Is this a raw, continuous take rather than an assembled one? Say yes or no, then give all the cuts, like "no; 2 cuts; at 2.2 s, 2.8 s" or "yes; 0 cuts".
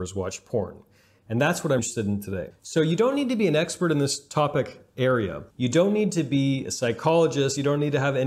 no; 2 cuts; at 1.8 s, 5.5 s